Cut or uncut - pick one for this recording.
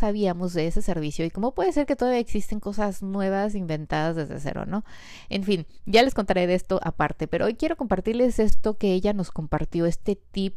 uncut